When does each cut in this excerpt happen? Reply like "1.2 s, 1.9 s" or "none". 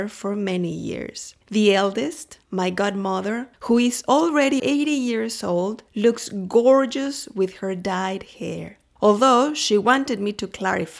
1.4 s, 4.6 s

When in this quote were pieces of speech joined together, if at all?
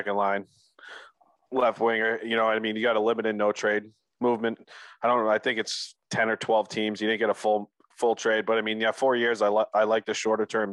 none

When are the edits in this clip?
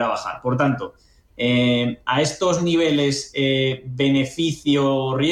none

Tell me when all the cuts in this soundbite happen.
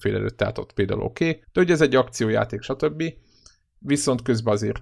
1.4 s

